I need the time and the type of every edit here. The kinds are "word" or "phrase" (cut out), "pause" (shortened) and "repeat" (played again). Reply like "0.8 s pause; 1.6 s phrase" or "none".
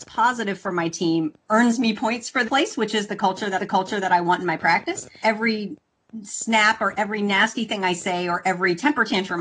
1.4 s pause; 2.5 s word; 3.6 s repeat; 5.2 s word